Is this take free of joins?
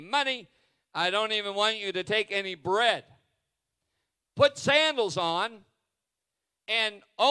yes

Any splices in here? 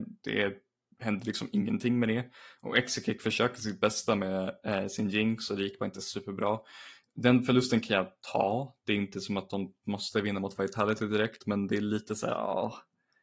no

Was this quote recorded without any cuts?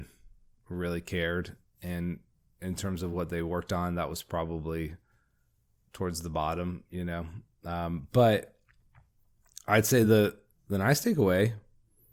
yes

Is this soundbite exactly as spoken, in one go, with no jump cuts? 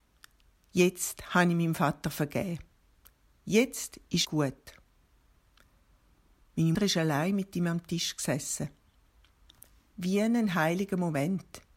no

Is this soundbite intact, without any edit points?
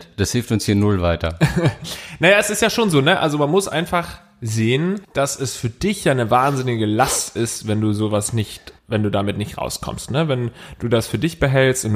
no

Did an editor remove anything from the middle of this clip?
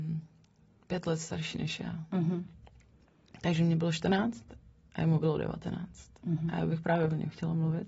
no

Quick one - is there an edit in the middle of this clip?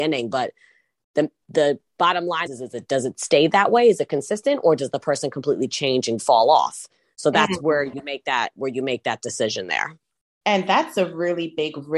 yes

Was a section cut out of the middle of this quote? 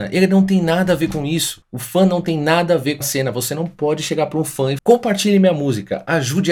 yes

